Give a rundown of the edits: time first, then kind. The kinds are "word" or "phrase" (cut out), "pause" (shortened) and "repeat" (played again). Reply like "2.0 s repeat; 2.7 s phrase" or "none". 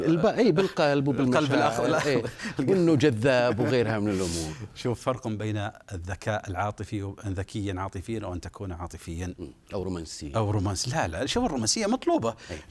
9.6 s pause